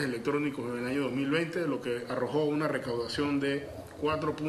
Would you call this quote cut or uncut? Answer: uncut